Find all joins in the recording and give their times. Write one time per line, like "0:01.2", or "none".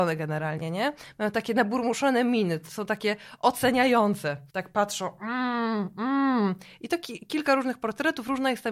0:04.5